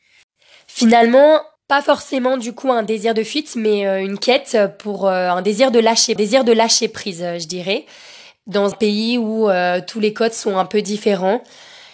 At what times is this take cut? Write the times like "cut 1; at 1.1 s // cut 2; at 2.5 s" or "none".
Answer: cut 1; at 1.6 s // cut 2; at 6.2 s // cut 3; at 8.7 s